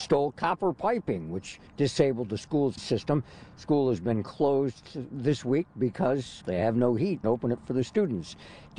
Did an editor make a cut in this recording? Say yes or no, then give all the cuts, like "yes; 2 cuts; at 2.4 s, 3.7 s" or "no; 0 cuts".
yes; 4 cuts; at 1.7 s, 2.8 s, 6.4 s, 7.2 s